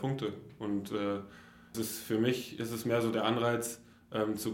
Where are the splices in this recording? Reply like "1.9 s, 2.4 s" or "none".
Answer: 1.7 s